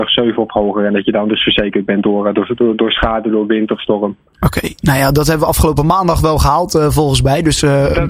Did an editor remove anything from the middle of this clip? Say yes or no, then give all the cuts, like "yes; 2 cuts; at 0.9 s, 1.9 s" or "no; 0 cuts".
no; 0 cuts